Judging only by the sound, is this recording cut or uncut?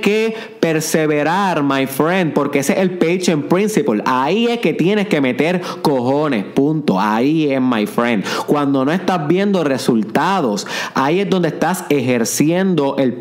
uncut